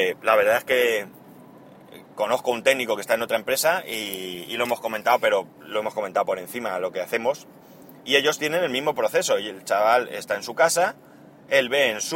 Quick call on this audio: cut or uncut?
cut